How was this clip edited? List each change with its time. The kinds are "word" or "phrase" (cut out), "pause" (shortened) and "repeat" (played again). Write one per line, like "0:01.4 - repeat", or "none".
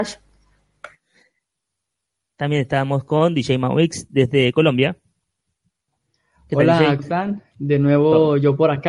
0:07.0 - word